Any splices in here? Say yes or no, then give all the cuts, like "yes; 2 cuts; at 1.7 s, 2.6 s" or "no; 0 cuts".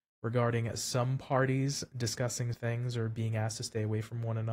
yes; 1 cut; at 2.5 s